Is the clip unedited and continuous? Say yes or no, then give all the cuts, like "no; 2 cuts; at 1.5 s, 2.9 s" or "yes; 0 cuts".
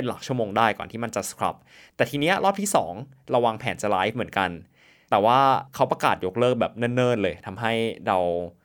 yes; 0 cuts